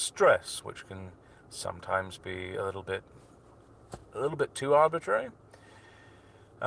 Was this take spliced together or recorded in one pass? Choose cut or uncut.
uncut